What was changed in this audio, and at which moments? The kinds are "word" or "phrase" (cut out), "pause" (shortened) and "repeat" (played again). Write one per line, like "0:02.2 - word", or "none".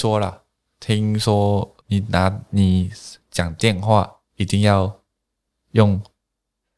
0:01.8 - pause
0:04.2 - pause